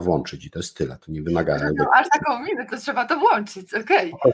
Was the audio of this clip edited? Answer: no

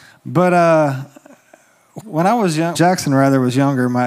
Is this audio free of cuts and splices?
no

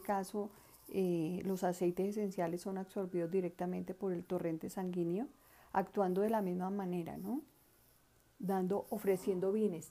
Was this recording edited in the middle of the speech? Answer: no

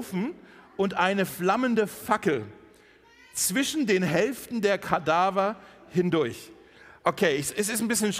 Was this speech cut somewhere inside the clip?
no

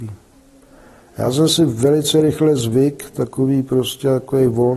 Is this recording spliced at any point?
no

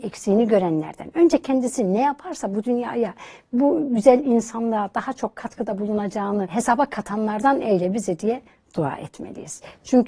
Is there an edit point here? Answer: no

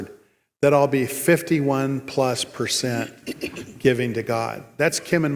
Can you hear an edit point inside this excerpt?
no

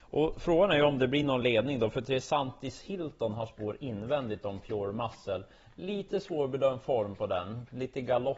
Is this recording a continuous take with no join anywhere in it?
yes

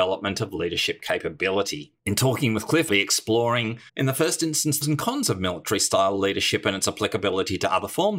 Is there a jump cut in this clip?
yes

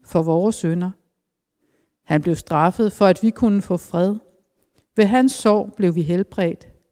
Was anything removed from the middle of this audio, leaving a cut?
no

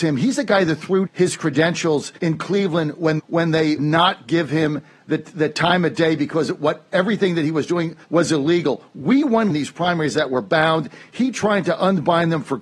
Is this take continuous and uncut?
no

